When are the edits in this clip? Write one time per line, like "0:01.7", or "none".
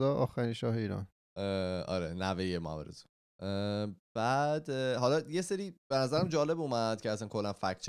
0:05.8